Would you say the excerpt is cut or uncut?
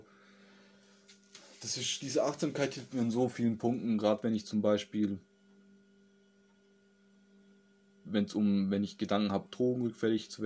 uncut